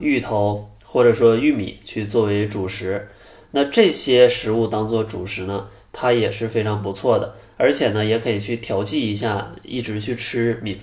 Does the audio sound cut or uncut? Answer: uncut